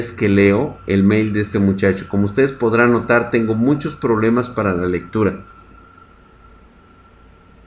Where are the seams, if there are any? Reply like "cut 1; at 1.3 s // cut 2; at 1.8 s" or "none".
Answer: none